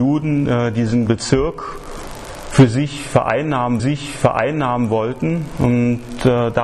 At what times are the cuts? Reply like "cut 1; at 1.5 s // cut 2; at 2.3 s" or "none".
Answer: cut 1; at 1.1 s // cut 2; at 3.8 s